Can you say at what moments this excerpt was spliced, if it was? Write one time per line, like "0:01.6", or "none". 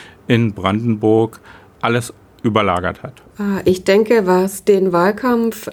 none